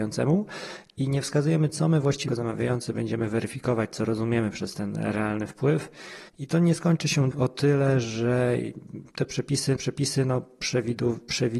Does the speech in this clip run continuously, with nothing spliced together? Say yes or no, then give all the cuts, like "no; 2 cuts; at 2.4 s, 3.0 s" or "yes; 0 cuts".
no; 4 cuts; at 2.3 s, 6.3 s, 7.3 s, 9.8 s